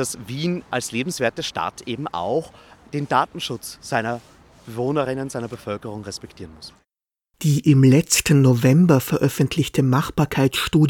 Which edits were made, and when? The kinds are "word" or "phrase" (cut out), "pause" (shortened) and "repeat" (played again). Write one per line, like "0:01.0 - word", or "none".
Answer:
none